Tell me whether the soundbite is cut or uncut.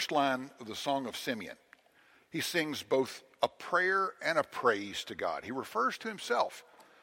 cut